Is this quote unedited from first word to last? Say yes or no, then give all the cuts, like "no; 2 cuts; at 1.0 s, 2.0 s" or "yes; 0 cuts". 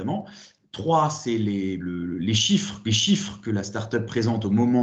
no; 2 cuts; at 1.8 s, 2.8 s